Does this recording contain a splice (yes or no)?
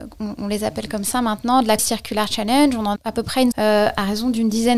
yes